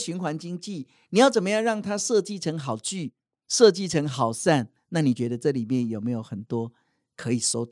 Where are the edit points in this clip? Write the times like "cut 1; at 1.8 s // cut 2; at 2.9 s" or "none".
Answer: none